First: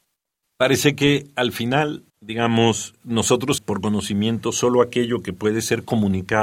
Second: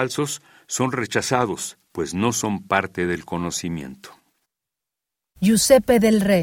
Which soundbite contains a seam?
first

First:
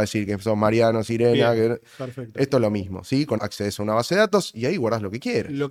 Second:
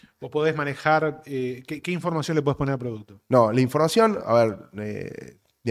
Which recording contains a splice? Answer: first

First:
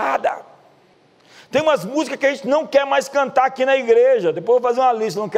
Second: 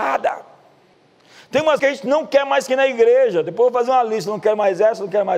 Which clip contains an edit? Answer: second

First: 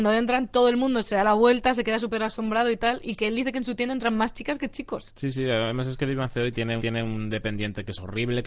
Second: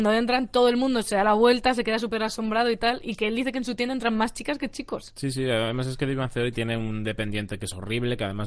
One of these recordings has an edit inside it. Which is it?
first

